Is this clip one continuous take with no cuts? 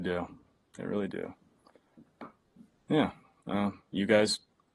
yes; 0 cuts

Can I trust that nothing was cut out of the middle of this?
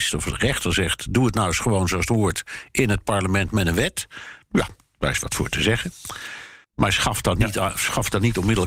no; 1 cut; at 6.6 s

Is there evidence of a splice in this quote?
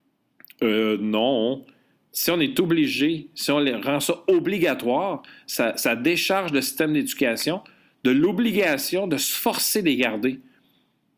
no; 0 cuts

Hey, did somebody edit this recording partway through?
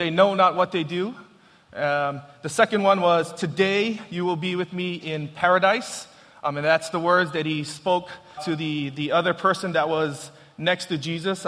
yes; 1 cut; at 8.4 s

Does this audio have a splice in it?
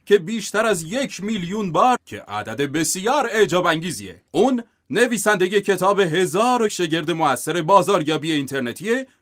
yes; 3 cuts; at 2.0 s, 4.3 s, 6.7 s

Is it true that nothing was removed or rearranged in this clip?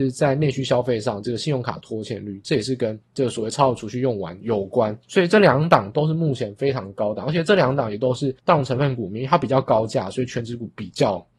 no; 3 cuts; at 3.0 s, 5.0 s, 8.4 s

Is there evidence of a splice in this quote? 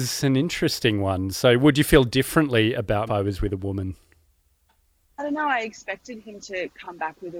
yes; 1 cut; at 3.1 s

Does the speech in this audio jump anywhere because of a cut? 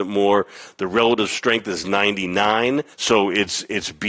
yes; 1 cut; at 2.9 s

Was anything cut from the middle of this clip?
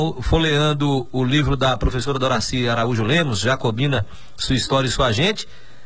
no; 0 cuts

